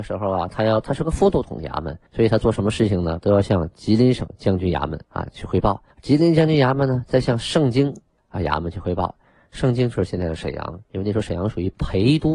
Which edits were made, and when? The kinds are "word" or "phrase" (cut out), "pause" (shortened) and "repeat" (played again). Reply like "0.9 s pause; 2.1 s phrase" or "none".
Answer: 2.1 s pause; 5.0 s pause; 5.9 s pause; 8.2 s pause